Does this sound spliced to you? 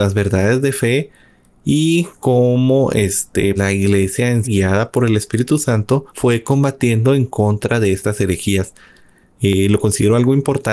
yes; 3 cuts; at 3.6 s, 4.4 s, 6.1 s

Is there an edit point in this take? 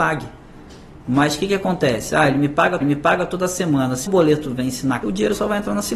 yes; 3 cuts; at 2.8 s, 4.1 s, 5.0 s

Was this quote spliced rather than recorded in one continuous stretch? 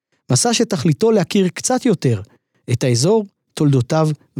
no; 0 cuts

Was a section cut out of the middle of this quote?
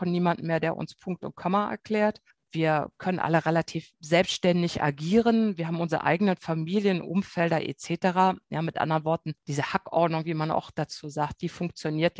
no; 0 cuts

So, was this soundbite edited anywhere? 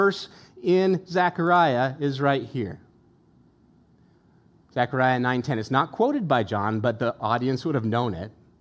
no; 0 cuts

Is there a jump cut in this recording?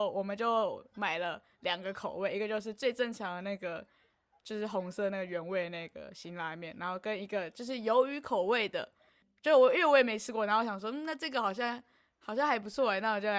no; 0 cuts

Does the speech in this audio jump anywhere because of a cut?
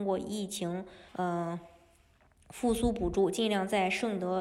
yes; 1 cut; at 1.1 s

